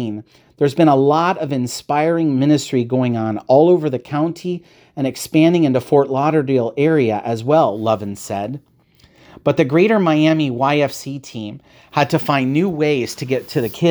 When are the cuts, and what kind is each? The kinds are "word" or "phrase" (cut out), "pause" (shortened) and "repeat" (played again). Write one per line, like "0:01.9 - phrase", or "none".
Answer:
none